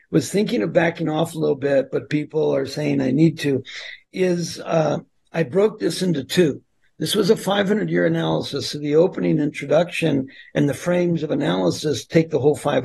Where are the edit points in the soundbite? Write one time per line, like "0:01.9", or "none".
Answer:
none